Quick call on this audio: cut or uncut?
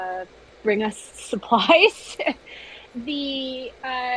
cut